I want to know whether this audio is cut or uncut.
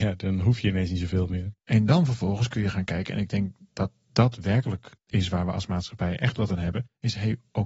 cut